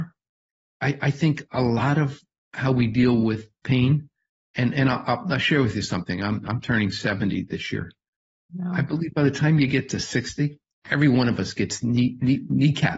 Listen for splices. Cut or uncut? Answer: uncut